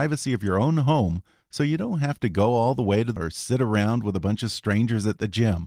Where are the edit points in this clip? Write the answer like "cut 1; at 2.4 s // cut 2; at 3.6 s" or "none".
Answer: cut 1; at 3.2 s